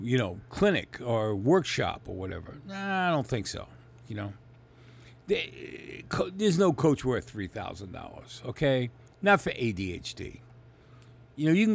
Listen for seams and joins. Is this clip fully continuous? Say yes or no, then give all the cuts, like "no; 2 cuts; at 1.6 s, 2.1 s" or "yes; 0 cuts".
yes; 0 cuts